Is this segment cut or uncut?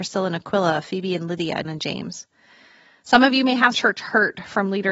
cut